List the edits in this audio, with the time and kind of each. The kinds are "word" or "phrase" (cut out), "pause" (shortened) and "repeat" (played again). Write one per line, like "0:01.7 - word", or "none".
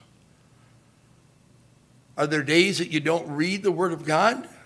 none